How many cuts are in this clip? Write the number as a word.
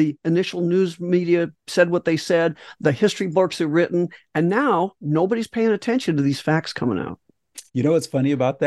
one